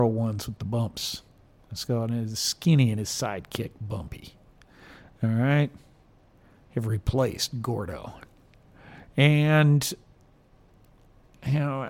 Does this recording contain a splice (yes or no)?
no